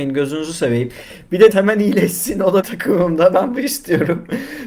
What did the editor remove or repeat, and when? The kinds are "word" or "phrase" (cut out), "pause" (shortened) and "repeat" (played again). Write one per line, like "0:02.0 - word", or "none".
0:01.5 - word
0:02.6 - word
0:03.6 - word